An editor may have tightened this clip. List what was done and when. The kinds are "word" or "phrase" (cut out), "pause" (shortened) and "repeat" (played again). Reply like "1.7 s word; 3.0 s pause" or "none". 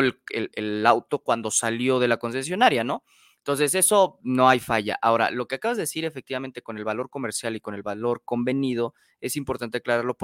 none